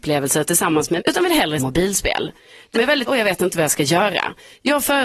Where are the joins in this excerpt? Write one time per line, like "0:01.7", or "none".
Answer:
0:01.0
0:01.6
0:02.7
0:03.1